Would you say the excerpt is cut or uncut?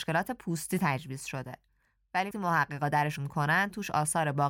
cut